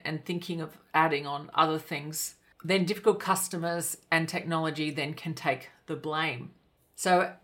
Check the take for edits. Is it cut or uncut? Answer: uncut